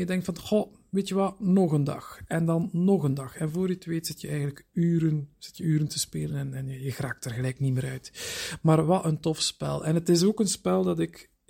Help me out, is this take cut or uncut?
uncut